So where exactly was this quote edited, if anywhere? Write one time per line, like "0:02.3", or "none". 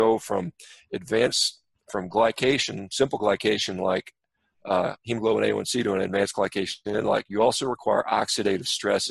none